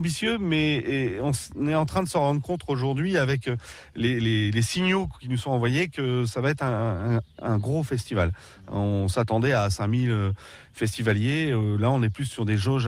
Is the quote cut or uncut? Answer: uncut